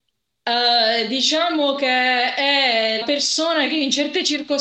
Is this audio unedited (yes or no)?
no